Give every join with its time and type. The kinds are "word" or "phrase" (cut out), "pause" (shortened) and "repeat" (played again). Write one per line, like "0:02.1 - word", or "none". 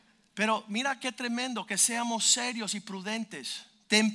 none